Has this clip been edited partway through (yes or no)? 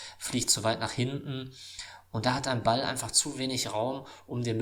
no